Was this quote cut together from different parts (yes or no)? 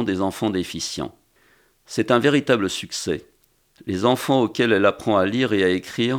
no